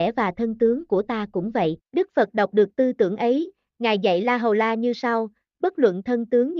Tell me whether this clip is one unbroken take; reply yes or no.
no